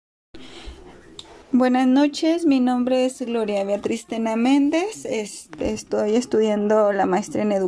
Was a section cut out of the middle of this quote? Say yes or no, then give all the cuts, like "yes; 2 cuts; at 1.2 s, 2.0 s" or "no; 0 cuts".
yes; 1 cut; at 1.4 s